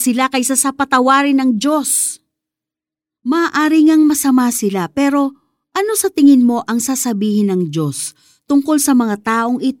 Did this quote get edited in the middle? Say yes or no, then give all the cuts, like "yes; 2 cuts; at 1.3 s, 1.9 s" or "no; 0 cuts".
no; 0 cuts